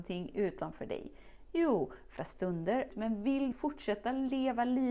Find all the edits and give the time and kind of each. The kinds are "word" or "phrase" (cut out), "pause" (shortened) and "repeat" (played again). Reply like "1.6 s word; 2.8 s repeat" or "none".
2.2 s word; 2.9 s word; 3.5 s word